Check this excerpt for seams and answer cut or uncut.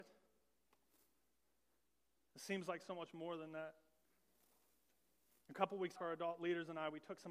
cut